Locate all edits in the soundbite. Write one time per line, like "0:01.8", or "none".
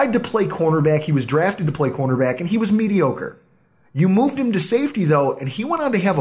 none